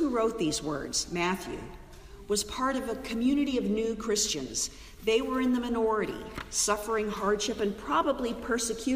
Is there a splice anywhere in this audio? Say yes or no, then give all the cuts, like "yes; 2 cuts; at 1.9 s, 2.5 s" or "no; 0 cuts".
no; 0 cuts